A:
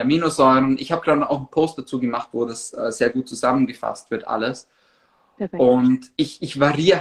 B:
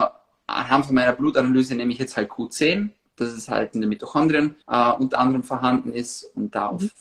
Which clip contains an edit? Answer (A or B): B